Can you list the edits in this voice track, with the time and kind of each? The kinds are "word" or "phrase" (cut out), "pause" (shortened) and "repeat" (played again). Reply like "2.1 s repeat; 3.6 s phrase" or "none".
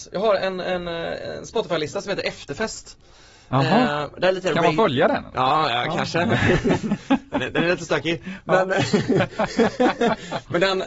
none